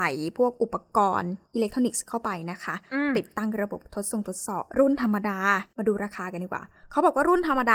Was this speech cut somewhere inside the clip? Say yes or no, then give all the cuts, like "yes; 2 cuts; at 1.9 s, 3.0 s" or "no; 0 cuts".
yes; 3 cuts; at 1.4 s, 4.7 s, 5.7 s